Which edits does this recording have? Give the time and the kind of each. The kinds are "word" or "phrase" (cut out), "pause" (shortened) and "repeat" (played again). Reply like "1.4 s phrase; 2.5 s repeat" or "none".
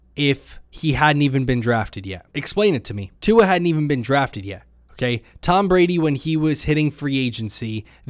2.3 s pause; 3.2 s pause